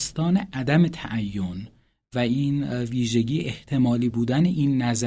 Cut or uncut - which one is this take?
uncut